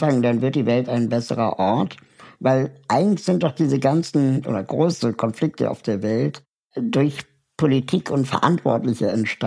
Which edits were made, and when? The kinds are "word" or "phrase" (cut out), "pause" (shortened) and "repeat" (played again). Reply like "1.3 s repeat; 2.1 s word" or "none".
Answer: none